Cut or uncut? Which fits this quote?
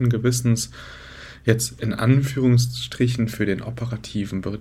uncut